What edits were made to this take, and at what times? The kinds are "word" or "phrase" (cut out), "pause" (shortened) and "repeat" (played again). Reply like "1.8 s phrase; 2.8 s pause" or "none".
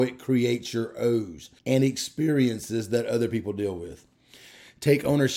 1.6 s pause